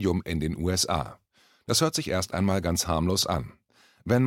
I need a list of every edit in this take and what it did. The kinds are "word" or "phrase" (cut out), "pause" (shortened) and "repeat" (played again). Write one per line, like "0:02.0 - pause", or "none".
none

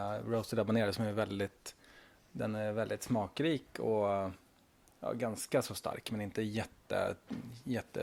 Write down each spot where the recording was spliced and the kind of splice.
none

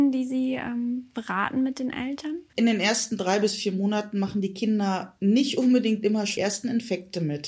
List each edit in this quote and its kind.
0:02.5 - pause
0:06.4 - word

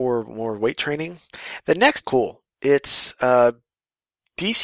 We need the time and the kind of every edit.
0:02.0 - phrase
0:02.5 - pause

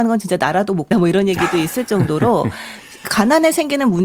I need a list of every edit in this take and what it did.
0:00.9 - word

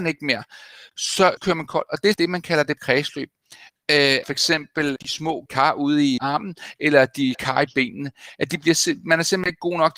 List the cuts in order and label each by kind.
0:01.4 - word
0:02.1 - word
0:02.8 - word
0:04.2 - word
0:05.0 - word
0:05.5 - word
0:06.2 - word
0:07.3 - word

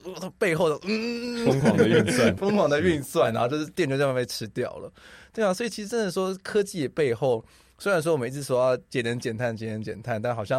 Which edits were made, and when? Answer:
0:02.4 - word

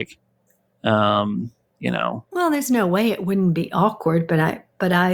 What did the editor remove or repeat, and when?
0:02.3 - pause

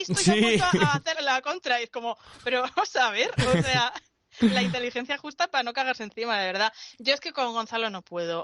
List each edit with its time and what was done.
0:01.1 - word

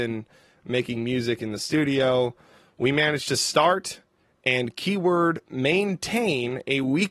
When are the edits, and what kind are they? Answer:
none

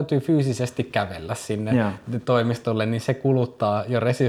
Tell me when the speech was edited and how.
none

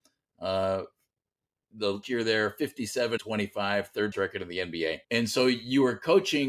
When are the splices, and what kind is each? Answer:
0:02.0 - phrase
0:03.2 - word
0:04.1 - word
0:05.0 - pause

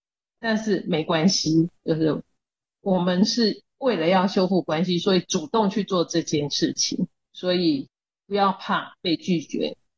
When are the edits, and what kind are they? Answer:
0:01.8 - pause

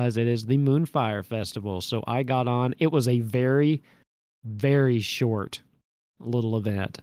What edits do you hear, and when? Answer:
none

